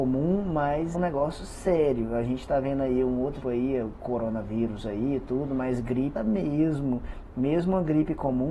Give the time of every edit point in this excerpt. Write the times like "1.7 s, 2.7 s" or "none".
0.9 s, 3.4 s, 6.2 s